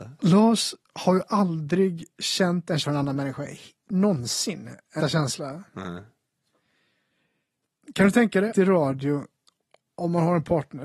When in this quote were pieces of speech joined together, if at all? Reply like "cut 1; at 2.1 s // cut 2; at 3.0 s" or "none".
cut 1; at 2.8 s // cut 2; at 5.0 s // cut 3; at 8.5 s